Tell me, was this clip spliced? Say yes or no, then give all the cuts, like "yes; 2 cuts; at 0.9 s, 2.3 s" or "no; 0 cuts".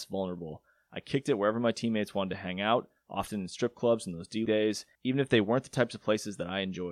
yes; 2 cuts; at 4.5 s, 4.9 s